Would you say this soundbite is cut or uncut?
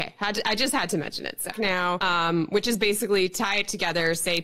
cut